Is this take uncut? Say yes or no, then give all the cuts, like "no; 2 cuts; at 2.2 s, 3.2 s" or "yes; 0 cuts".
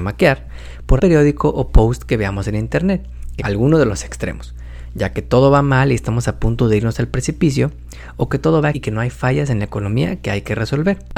no; 3 cuts; at 1.0 s, 3.4 s, 8.7 s